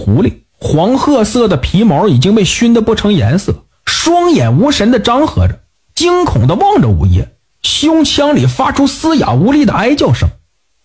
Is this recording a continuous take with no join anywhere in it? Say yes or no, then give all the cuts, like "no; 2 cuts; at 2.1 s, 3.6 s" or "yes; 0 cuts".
yes; 0 cuts